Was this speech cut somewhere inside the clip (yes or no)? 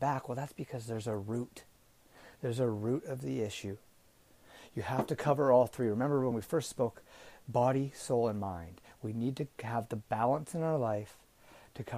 no